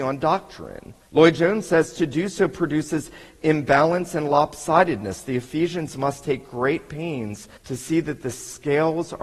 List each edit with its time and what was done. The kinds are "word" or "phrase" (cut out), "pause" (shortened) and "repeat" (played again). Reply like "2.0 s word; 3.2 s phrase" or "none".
1.0 s pause; 7.6 s pause

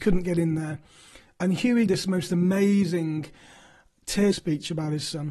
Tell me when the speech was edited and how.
1.9 s word; 4.3 s word

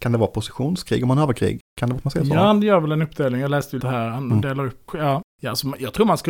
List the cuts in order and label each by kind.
1.7 s pause; 3.8 s word; 4.9 s word

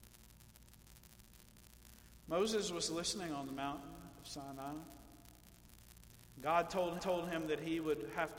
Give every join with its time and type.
7.0 s repeat

